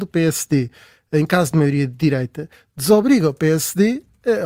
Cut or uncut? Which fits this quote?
uncut